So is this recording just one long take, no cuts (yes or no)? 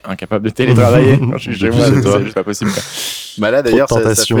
no